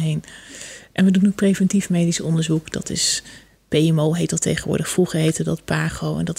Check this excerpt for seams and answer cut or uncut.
uncut